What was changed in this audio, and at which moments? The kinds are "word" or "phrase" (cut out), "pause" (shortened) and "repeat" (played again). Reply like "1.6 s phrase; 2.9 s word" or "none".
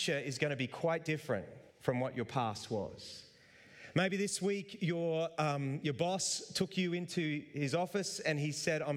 1.7 s pause